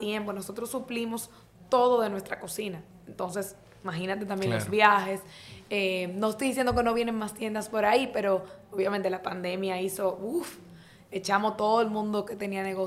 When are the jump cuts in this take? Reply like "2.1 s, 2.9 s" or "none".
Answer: none